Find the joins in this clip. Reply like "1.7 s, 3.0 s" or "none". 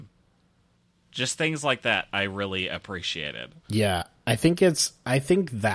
3.6 s